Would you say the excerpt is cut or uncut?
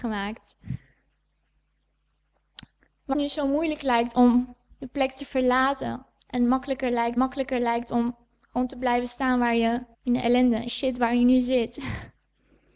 cut